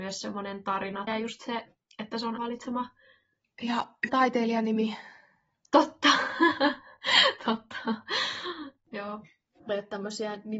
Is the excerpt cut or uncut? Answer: cut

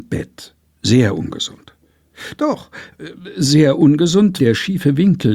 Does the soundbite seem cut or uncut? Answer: cut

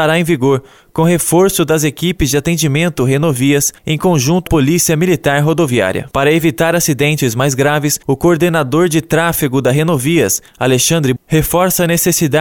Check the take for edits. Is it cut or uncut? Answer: cut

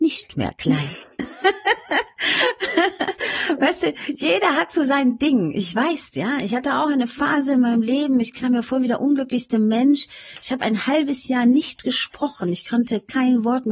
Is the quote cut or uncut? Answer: cut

